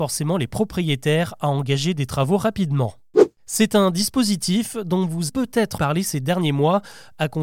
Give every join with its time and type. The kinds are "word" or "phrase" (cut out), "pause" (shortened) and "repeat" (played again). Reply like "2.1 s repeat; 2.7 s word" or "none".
5.3 s word; 5.8 s word